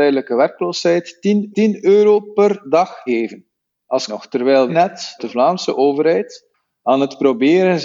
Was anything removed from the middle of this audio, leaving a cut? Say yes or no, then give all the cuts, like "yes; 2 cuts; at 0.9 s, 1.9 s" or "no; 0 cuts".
yes; 5 cuts; at 1.5 s, 3.1 s, 4.1 s, 4.7 s, 5.2 s